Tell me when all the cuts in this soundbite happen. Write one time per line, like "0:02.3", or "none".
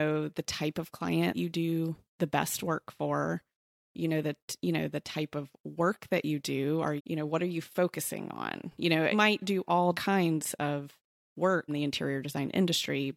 0:01.3
0:07.0
0:09.1
0:09.9
0:11.7